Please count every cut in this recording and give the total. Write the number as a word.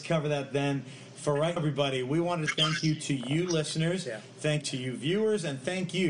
three